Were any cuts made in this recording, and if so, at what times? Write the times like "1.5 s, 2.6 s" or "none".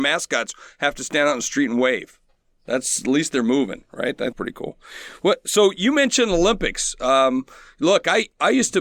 4.3 s